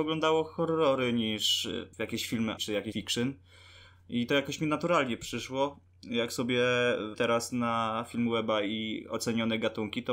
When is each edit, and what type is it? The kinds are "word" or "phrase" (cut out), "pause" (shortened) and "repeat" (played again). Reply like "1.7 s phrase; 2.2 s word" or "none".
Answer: 1.9 s pause; 2.6 s word; 2.9 s word; 7.1 s word

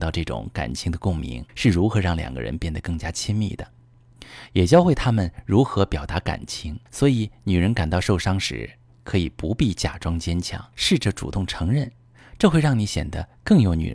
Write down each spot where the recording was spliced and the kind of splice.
1.5 s pause; 6.9 s pause; 10.7 s pause

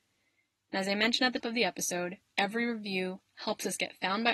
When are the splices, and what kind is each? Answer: 1.4 s word

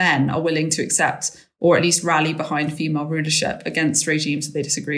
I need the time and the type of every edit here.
none

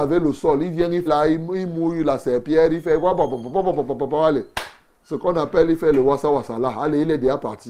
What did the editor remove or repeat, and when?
1.1 s word

